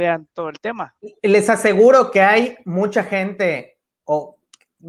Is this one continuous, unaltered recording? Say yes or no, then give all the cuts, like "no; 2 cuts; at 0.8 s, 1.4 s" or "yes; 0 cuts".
yes; 0 cuts